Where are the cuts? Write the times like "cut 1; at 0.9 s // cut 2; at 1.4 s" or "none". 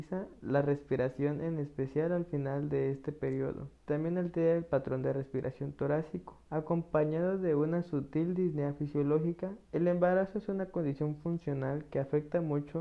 cut 1; at 3.7 s // cut 2; at 6.4 s // cut 3; at 9.6 s